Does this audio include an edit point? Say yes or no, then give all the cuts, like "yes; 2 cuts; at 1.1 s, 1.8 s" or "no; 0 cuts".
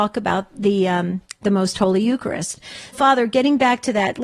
yes; 1 cut; at 2.9 s